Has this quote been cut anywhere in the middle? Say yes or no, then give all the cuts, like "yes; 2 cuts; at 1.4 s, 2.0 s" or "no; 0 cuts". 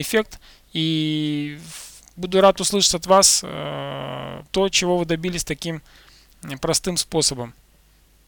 yes; 1 cut; at 4.5 s